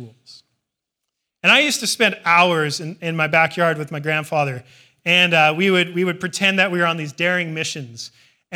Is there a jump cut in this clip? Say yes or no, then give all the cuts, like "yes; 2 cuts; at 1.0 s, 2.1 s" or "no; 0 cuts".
no; 0 cuts